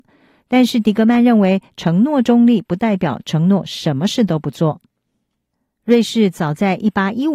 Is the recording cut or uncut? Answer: uncut